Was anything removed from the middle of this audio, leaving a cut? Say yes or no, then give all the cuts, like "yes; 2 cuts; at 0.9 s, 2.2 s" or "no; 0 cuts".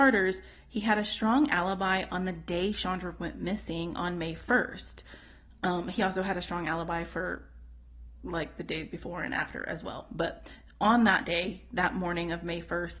no; 0 cuts